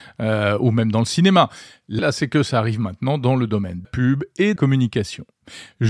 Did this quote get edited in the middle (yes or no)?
yes